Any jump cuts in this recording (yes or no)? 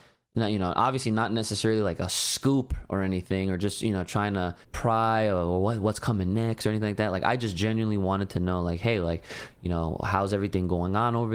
yes